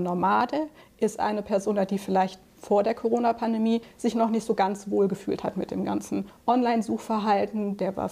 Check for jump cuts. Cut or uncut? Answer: uncut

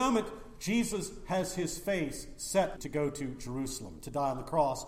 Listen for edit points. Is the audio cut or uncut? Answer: cut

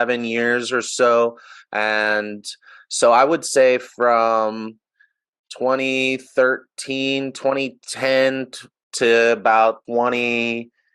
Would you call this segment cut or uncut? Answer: cut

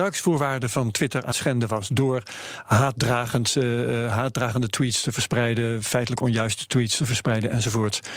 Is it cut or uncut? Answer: cut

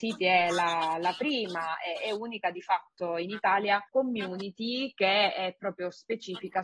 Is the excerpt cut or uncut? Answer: cut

